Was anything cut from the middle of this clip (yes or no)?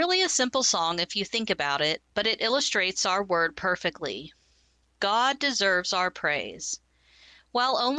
no